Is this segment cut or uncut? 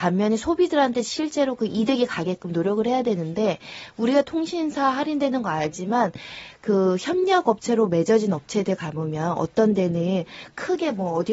uncut